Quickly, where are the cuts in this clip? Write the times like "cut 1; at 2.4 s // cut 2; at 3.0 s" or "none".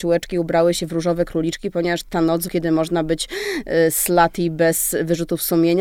cut 1; at 2.1 s // cut 2; at 2.5 s